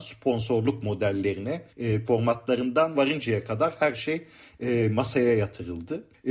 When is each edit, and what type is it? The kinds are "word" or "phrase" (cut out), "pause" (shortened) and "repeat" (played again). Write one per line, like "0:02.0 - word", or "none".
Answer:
0:02.1 - word
0:02.9 - phrase